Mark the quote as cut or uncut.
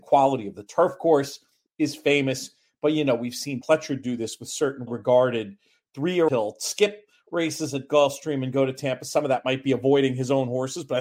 cut